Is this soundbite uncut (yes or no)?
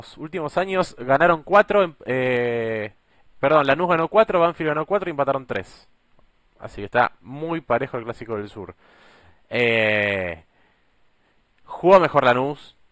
yes